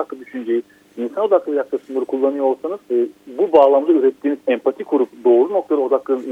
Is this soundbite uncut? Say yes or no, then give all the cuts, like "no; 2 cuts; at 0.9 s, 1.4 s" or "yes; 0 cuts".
no; 2 cuts; at 2.8 s, 4.4 s